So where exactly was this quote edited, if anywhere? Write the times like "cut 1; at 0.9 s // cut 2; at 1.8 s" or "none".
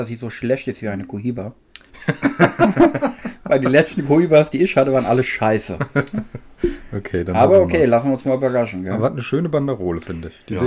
none